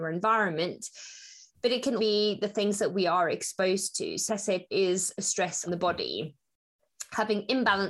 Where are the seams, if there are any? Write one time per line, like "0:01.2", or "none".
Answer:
0:02.0
0:04.3
0:04.7
0:05.7